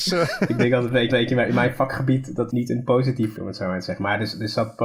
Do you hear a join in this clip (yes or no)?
yes